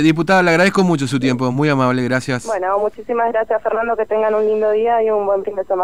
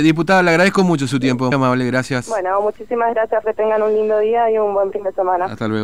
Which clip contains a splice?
second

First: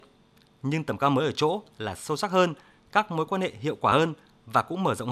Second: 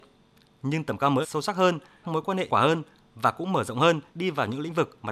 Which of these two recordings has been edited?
second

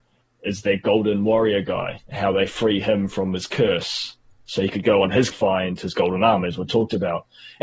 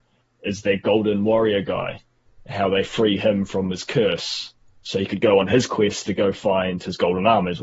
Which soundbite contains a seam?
first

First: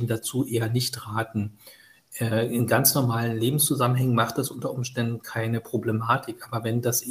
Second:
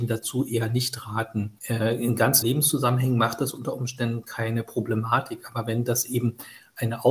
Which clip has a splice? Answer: second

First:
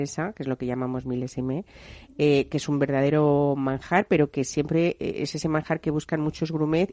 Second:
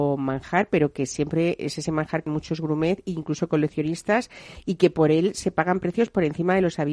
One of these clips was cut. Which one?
second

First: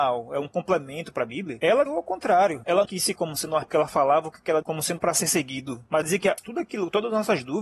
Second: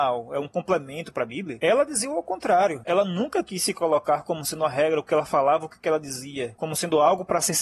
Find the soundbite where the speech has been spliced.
first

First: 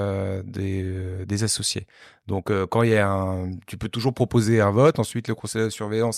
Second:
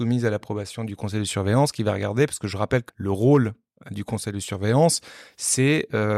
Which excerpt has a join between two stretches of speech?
second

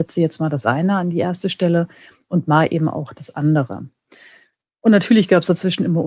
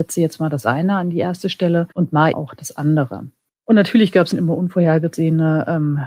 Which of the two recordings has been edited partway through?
second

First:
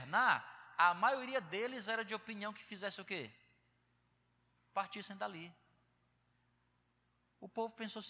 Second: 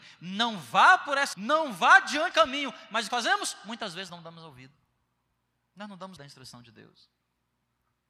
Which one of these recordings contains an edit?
second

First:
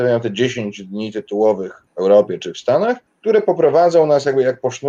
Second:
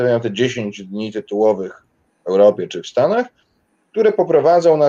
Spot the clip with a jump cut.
first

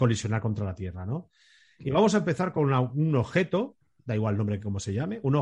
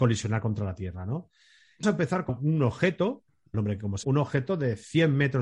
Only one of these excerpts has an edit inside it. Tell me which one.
second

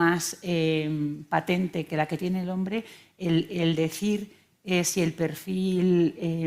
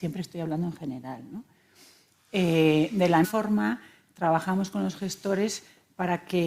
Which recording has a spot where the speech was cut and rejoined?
second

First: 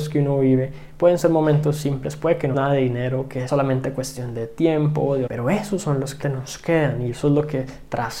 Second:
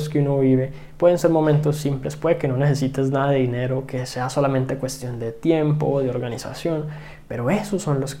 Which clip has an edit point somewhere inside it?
first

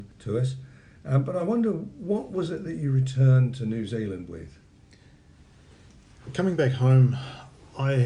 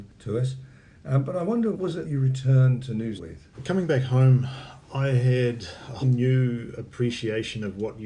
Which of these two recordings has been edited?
second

